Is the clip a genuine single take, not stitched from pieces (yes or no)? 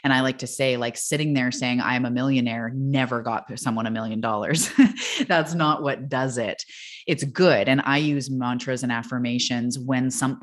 yes